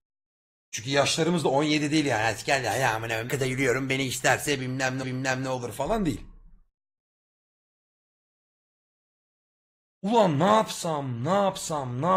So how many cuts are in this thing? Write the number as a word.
two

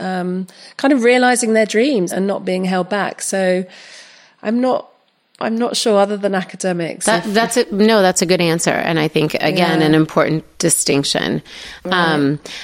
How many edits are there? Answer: one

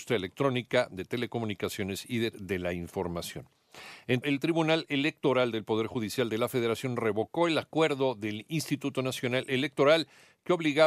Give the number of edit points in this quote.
two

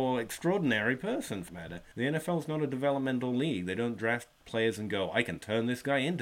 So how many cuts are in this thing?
one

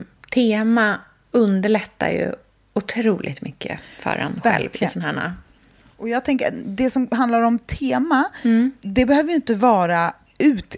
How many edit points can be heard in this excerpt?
zero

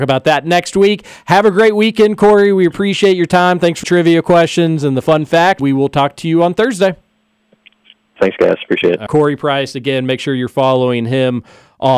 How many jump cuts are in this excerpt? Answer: three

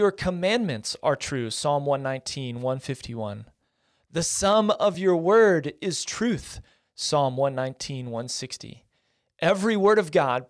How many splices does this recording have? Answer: zero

